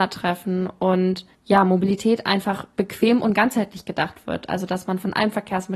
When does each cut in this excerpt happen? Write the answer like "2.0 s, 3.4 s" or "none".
1.3 s, 2.7 s